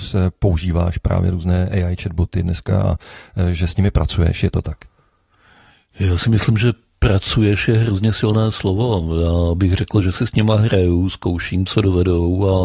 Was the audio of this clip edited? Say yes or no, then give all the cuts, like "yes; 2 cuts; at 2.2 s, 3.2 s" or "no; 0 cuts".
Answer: no; 0 cuts